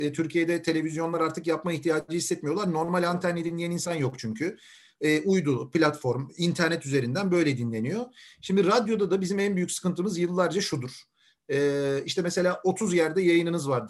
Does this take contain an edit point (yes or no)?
no